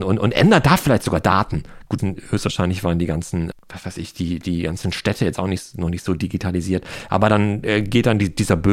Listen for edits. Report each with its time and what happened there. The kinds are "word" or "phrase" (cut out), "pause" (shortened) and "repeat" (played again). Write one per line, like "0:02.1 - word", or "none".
0:02.0 - phrase
0:03.5 - word